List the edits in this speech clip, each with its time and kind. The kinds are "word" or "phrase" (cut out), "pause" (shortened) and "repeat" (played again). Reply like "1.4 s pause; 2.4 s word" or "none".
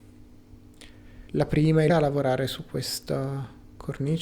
1.3 s pause; 1.9 s word